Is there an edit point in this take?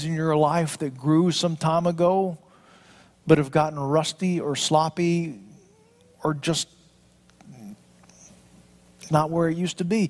yes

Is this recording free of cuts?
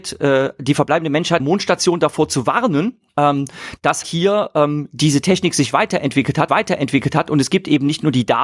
no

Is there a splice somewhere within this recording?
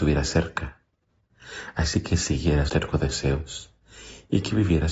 yes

